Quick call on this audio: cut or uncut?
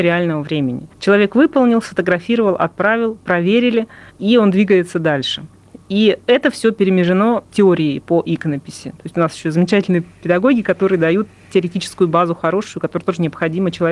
cut